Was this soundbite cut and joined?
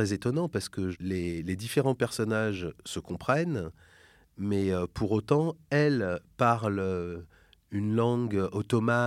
no; 0 cuts

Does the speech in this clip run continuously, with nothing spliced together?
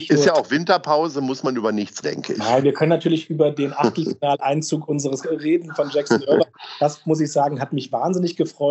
no; 3 cuts; at 2.0 s, 5.2 s, 6.5 s

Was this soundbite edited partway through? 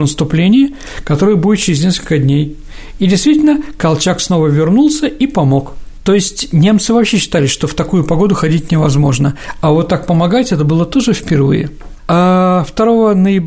no; 0 cuts

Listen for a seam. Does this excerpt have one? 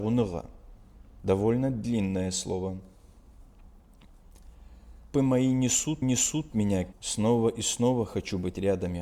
yes; 4 cuts; at 1.2 s, 5.1 s, 6.0 s, 6.9 s

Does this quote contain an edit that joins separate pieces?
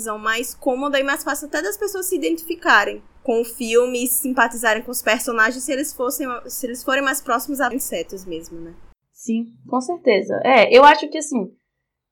yes; 2 cuts; at 3.2 s, 7.7 s

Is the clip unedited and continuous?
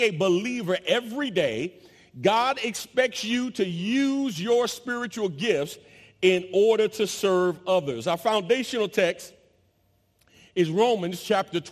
yes; 0 cuts

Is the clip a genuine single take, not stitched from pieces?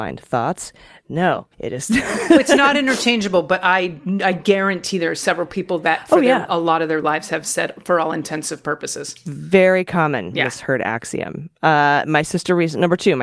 no; 1 cut; at 1.5 s

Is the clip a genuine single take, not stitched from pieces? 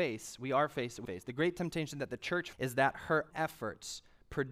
no; 3 cuts; at 1.0 s, 2.5 s, 3.3 s

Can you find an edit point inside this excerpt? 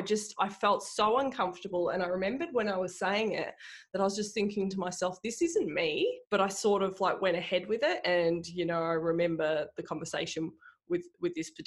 yes; 1 cut; at 6.3 s

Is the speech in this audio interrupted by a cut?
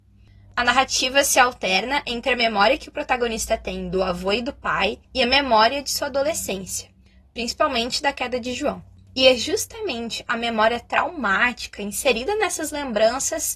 no; 0 cuts

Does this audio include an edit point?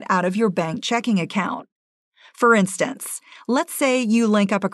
no; 0 cuts

